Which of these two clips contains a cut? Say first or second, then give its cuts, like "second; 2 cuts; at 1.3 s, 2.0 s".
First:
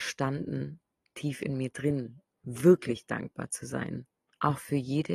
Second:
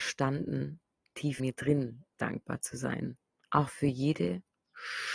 second; 2 cuts; at 1.4 s, 2.2 s